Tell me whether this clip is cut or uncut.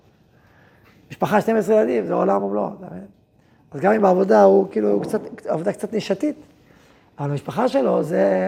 uncut